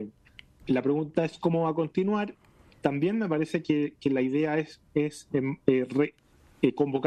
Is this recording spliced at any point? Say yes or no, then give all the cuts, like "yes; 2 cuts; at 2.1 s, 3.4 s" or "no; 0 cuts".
no; 0 cuts